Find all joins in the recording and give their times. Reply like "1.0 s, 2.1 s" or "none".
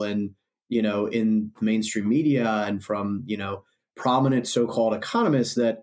none

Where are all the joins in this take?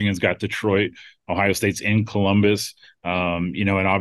none

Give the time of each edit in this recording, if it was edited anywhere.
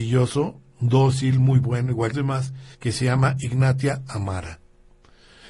2.1 s, 2.7 s

